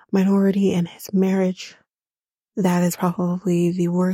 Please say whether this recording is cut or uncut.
cut